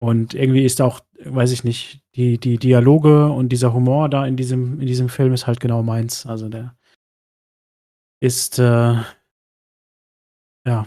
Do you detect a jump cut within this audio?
no; 0 cuts

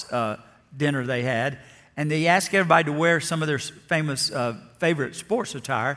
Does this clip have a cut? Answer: no; 0 cuts

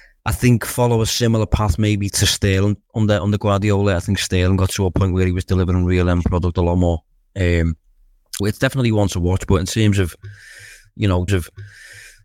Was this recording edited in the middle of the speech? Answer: yes; 4 cuts; at 2.1 s, 2.8 s, 8.4 s, 11.3 s

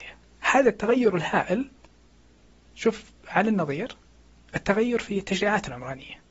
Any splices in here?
no; 0 cuts

